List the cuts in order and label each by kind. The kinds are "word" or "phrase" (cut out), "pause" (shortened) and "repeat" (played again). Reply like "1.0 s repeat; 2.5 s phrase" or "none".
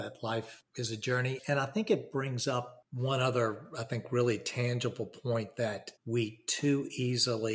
6.0 s pause